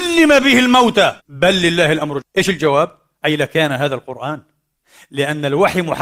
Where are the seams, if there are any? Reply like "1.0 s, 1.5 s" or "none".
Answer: 1.2 s, 2.2 s